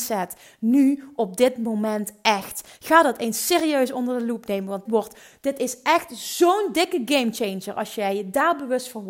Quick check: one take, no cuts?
no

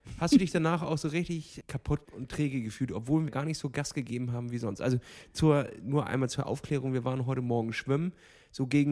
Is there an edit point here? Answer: yes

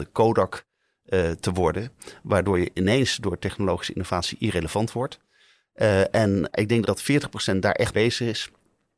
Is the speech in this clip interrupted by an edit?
yes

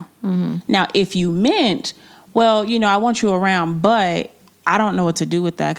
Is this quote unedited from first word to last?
yes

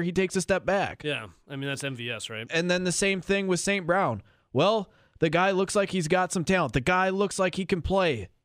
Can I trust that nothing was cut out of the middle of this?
yes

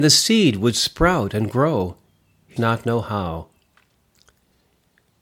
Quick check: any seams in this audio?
yes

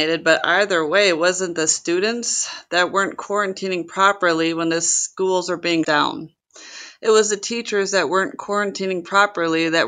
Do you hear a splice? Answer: yes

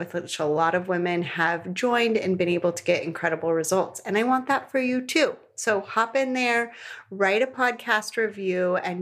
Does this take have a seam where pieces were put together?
no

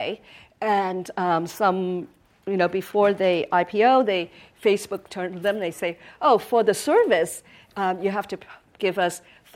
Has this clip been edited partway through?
no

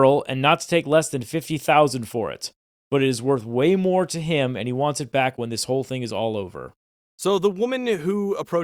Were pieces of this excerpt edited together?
no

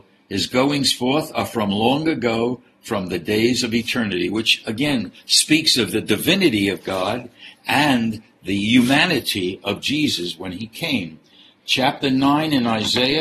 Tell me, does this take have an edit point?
no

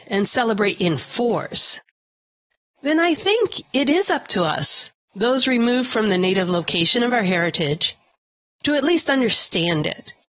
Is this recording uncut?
yes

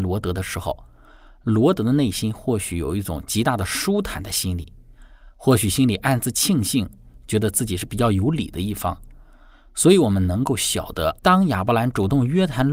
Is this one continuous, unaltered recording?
no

